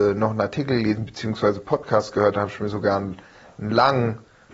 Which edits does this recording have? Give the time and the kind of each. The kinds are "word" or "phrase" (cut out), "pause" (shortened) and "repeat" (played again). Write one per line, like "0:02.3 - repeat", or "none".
none